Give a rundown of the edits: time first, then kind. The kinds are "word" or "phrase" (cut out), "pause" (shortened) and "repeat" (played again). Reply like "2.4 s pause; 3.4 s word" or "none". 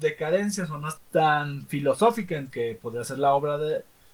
1.0 s word; 2.5 s phrase